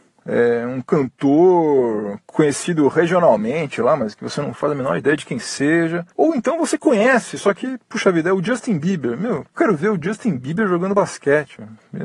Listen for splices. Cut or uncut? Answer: uncut